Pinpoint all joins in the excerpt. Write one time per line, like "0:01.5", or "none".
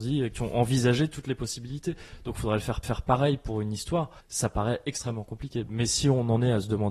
0:02.8
0:04.2

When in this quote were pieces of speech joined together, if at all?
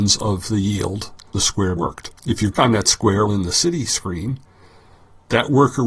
0:01.3
0:01.8
0:02.2
0:02.5
0:03.3

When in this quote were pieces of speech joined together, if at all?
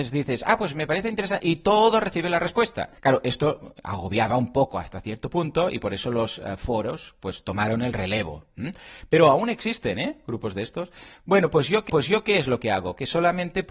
0:03.0
0:11.9

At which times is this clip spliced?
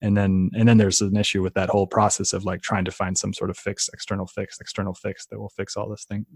0:04.6

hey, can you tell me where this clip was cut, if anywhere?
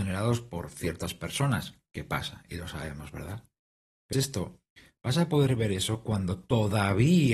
0:04.1

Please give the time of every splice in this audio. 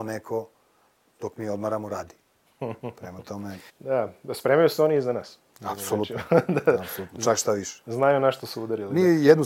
0:03.7

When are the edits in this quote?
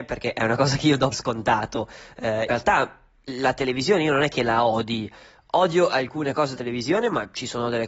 0:01.1
0:02.5
0:06.6

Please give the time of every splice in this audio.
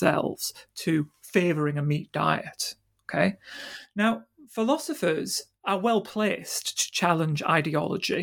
none

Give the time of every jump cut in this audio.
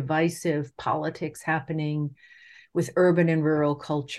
none

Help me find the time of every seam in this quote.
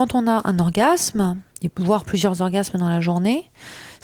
none

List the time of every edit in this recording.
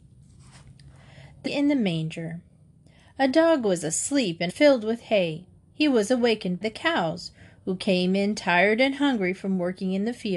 0:01.5
0:04.5
0:06.6

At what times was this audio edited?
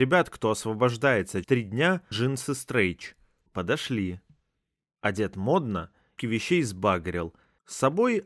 0:01.4
0:02.1
0:06.2

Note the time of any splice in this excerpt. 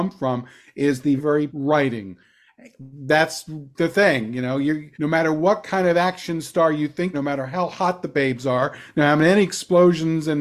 0:01.2
0:01.5
0:04.9
0:07.1

